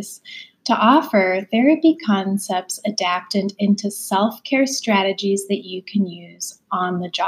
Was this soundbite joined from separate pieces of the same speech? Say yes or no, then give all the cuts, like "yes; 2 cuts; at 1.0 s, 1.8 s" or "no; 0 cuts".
no; 0 cuts